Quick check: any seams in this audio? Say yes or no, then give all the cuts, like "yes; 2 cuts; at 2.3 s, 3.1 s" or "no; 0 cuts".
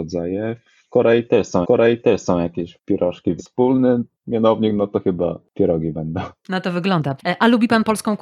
yes; 2 cuts; at 1.6 s, 3.4 s